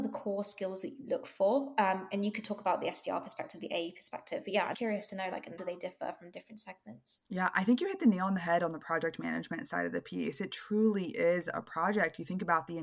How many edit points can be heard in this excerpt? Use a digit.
3